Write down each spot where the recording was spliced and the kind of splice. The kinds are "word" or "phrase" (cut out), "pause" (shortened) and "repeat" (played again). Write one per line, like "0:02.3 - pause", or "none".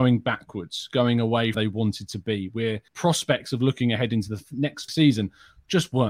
0:01.5 - phrase
0:02.9 - pause
0:04.9 - word